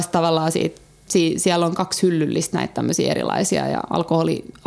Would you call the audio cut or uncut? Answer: uncut